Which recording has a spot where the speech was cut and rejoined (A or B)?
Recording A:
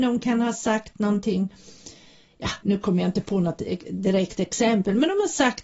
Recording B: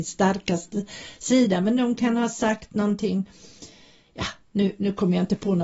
A